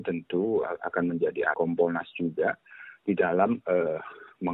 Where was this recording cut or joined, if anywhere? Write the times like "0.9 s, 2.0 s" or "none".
1.5 s